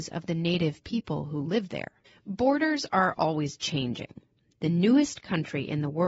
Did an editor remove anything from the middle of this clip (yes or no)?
yes